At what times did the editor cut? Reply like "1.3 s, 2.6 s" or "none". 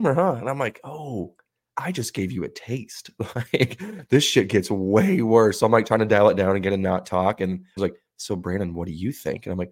7.8 s